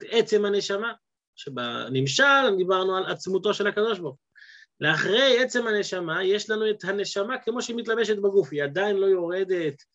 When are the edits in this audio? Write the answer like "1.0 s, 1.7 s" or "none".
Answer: none